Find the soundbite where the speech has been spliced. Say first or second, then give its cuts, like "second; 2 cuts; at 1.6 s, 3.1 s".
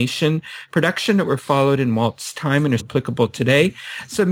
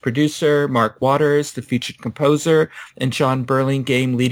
first; 1 cut; at 2.8 s